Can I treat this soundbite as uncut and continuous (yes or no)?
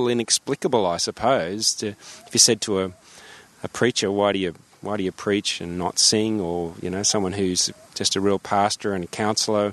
yes